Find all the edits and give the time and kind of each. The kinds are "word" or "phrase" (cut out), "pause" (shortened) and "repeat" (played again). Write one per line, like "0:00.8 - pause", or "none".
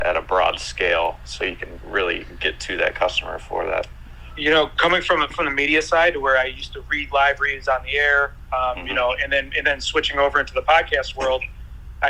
0:05.3 - word